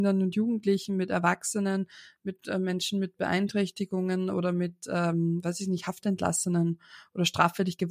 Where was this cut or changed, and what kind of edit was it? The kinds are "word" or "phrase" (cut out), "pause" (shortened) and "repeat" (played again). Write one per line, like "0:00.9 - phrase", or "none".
none